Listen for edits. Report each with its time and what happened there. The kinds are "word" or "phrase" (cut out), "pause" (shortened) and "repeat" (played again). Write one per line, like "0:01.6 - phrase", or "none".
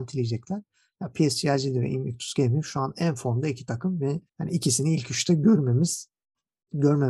0:04.3 - pause